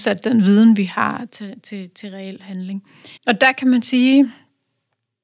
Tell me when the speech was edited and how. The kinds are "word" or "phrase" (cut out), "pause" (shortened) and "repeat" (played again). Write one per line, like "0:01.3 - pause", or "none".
0:03.2 - pause